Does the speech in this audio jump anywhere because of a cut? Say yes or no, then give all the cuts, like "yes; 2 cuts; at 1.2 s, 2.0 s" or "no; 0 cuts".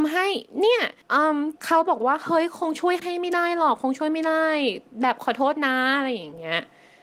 yes; 2 cuts; at 1.0 s, 1.6 s